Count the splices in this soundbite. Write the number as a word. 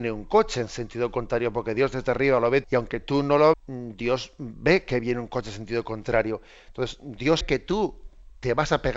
three